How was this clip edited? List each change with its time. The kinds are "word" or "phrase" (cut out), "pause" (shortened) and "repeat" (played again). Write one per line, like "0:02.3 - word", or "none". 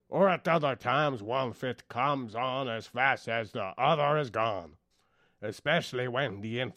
0:04.9 - pause